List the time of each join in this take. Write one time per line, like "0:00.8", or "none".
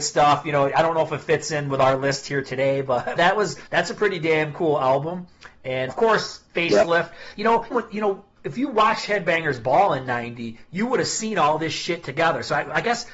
0:03.2
0:03.7
0:05.9
0:06.5
0:07.7
0:08.3